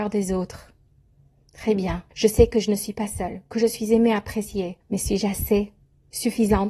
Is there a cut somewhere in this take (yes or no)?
yes